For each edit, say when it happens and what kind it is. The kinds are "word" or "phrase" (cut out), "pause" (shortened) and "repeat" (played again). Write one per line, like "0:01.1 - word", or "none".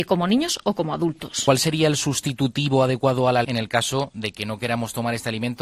0:03.4 - word